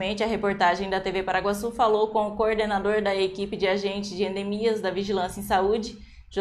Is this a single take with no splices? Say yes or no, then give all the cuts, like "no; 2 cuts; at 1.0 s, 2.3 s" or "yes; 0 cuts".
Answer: yes; 0 cuts